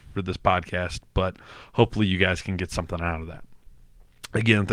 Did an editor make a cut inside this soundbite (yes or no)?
no